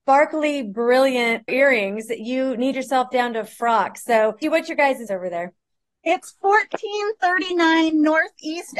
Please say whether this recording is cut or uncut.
cut